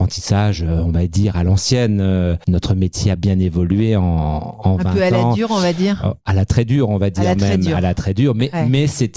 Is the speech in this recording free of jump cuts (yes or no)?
yes